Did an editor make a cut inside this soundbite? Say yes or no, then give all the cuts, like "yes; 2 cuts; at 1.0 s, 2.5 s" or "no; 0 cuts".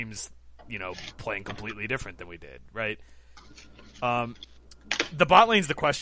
no; 0 cuts